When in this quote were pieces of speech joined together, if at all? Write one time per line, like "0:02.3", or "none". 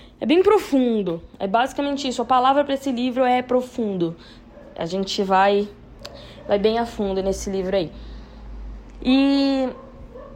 none